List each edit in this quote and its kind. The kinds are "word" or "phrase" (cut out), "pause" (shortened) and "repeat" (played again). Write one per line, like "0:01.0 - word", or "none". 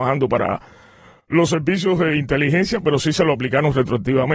none

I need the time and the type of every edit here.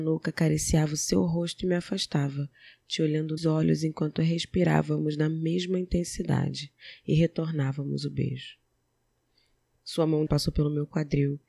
0:03.4 - word
0:10.3 - word

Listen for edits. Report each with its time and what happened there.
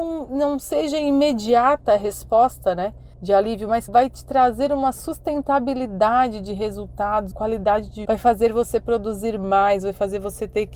0:03.1 - pause
0:03.9 - word
0:07.3 - word
0:08.0 - word

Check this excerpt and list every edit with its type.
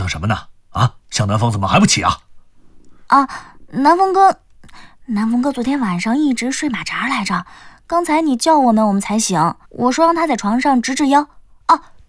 0:01.0 - pause
0:09.6 - pause

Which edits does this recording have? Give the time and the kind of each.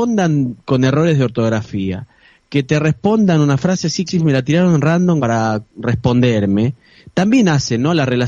0:04.1 - word
0:05.2 - word
0:05.7 - pause

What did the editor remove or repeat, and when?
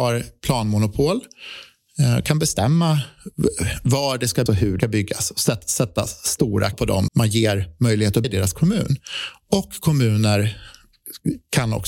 0:04.5 - word
0:04.8 - word
0:06.7 - word
0:07.1 - word
0:08.2 - word

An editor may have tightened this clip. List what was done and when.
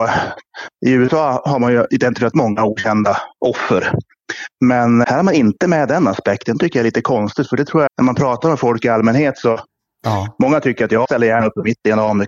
0:02.3 - word
0:05.0 - word
0:07.9 - word
0:11.0 - word

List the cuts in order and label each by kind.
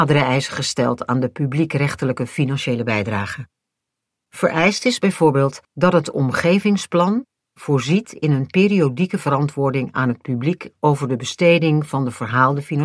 0:05.6 - pause

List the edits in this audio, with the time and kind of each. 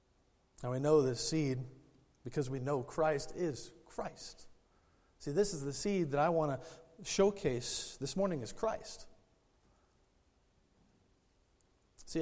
none

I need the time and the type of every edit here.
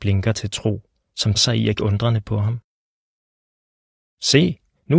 0:01.3 - word
0:01.8 - word

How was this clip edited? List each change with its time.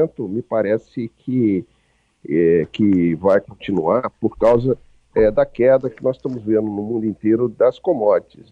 none

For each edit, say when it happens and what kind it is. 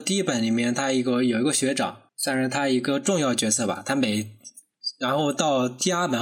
0:02.1 - pause

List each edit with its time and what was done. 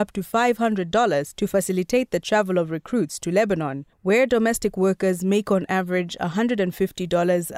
0:03.9 - pause

